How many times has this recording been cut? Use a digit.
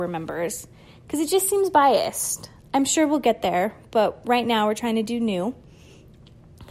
0